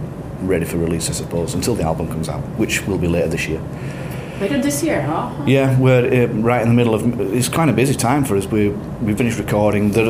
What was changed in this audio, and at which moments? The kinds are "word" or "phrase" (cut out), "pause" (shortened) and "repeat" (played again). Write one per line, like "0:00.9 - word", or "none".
0:09.2 - word